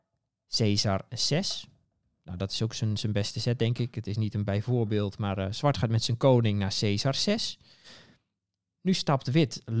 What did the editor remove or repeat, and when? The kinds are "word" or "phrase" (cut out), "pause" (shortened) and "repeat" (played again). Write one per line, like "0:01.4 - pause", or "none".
none